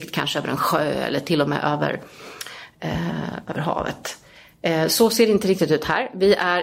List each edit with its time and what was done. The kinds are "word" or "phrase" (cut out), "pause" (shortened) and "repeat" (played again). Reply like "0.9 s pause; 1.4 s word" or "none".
none